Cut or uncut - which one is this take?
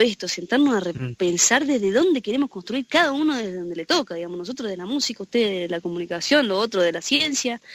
uncut